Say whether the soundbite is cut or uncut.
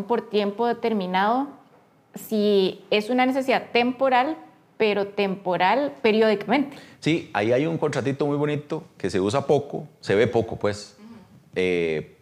uncut